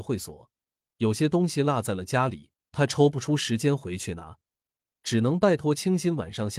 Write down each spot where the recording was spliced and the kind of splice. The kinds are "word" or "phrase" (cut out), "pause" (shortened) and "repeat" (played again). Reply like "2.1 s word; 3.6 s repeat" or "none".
2.6 s pause

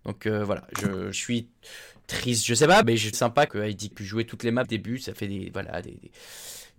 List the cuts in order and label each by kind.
1.1 s word; 2.8 s word; 3.1 s word; 3.5 s word; 3.9 s word; 4.6 s word

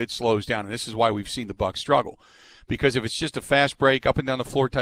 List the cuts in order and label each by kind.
none

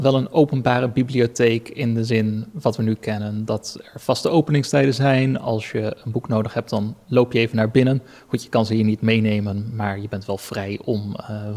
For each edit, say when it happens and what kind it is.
none

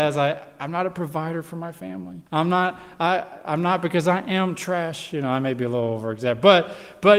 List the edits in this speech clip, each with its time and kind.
2.3 s pause

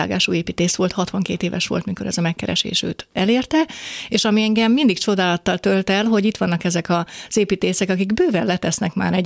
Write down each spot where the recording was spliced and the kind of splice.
none

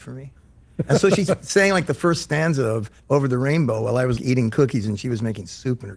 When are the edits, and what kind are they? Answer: 3.0 s pause; 4.2 s word

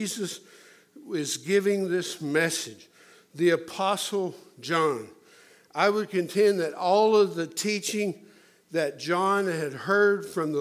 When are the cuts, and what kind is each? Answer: none

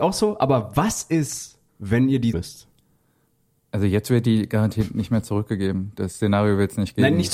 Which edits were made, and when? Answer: 1.7 s pause; 2.3 s word

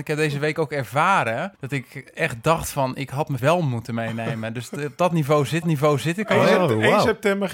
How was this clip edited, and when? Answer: 1.6 s pause; 3.4 s word; 5.6 s repeat

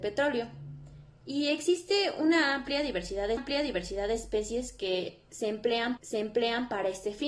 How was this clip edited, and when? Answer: 3.4 s repeat; 6.0 s repeat

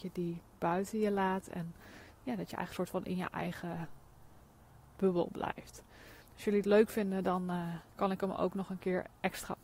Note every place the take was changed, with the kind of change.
6.2 s pause; 7.9 s pause

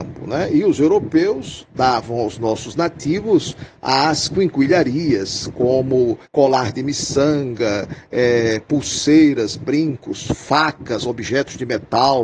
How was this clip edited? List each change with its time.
6.3 s pause

